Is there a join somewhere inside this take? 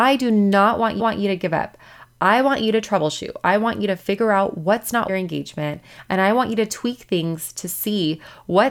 yes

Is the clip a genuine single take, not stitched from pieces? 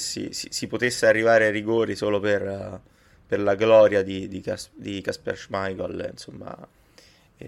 yes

